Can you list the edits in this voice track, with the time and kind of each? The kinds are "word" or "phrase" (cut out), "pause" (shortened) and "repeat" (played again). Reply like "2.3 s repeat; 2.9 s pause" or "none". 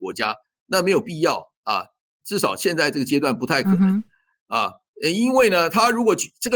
1.5 s pause